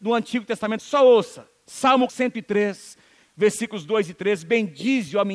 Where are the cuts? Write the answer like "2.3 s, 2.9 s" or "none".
2.1 s

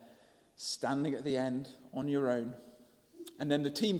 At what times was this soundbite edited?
none

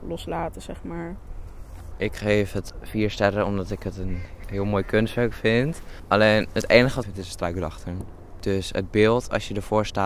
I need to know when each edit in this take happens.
7.0 s

